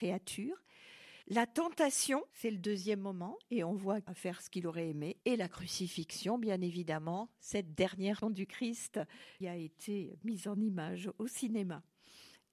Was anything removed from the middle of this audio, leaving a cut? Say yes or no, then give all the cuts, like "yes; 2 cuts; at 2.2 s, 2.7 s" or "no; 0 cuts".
yes; 6 cuts; at 1.2 s, 2.3 s, 4.1 s, 5.2 s, 8.2 s, 9.4 s